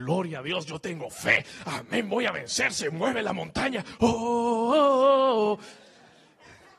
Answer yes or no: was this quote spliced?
no